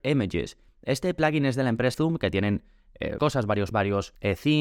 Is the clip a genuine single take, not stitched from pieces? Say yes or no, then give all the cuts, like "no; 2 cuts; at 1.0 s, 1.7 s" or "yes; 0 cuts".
no; 3 cuts; at 1.9 s, 3.2 s, 3.7 s